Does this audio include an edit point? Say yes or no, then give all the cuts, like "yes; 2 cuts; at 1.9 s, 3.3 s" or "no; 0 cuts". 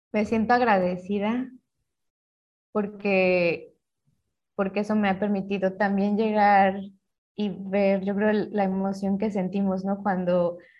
no; 0 cuts